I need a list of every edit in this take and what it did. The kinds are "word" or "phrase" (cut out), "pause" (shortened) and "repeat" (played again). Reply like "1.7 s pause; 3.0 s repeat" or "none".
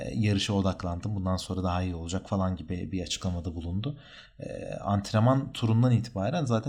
none